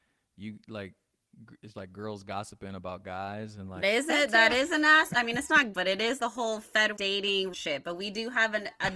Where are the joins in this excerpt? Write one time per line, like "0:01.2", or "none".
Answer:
0:01.7
0:03.8
0:05.7
0:06.2
0:07.0
0:07.5